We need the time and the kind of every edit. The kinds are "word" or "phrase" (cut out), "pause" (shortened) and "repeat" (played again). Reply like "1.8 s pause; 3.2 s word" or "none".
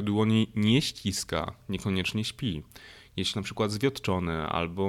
3.3 s word